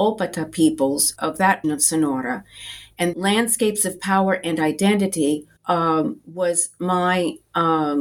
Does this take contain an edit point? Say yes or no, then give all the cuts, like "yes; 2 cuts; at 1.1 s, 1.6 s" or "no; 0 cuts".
yes; 4 cuts; at 1.2 s, 1.6 s, 3.1 s, 5.6 s